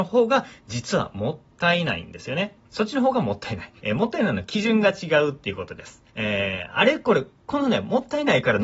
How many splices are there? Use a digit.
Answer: 3